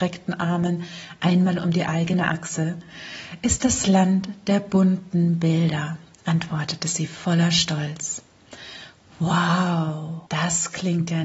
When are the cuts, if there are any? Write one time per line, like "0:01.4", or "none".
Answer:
0:10.3